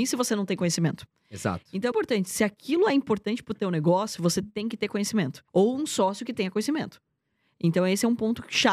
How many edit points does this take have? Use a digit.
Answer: 2